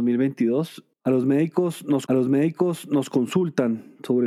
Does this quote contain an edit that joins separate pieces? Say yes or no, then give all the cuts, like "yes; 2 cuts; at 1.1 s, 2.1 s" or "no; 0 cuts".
yes; 2 cuts; at 0.9 s, 2.1 s